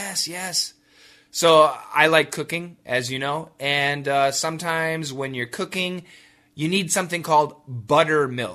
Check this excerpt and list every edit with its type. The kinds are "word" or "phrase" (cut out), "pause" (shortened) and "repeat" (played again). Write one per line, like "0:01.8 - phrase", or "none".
none